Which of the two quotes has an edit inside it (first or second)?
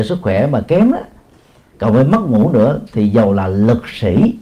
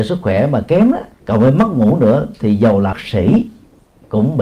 second